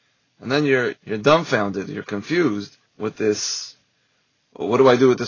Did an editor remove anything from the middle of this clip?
yes; 2 cuts; at 0.9 s, 2.9 s

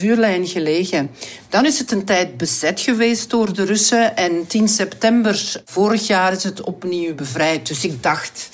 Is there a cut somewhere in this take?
no; 0 cuts

